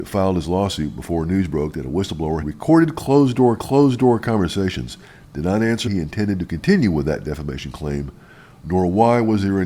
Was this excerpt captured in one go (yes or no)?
no